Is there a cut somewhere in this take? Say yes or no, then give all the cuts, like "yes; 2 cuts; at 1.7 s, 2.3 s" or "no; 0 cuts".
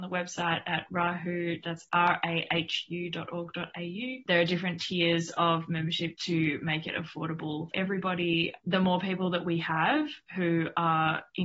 yes; 1 cut; at 7.7 s